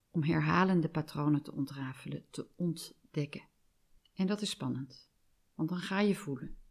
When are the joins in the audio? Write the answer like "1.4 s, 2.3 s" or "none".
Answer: 4.0 s